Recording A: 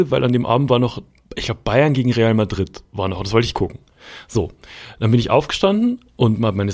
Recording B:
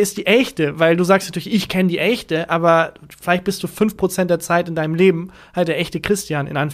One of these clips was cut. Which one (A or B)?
A